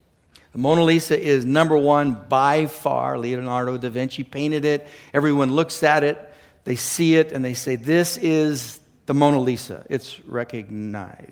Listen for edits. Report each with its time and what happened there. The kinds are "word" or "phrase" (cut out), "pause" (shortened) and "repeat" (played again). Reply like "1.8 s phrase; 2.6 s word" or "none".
none